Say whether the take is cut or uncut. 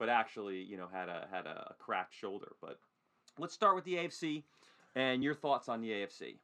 uncut